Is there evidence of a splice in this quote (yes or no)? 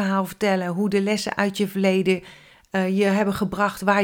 no